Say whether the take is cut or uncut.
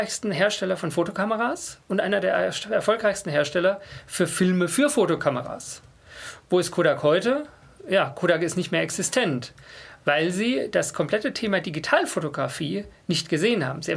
uncut